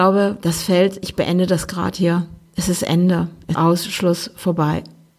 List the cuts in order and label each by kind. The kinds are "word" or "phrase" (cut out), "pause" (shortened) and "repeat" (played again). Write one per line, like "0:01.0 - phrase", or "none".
0:03.5 - word